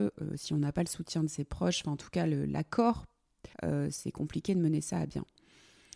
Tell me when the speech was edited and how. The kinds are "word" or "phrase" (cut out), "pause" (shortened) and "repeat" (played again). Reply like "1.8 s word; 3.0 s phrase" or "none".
3.5 s pause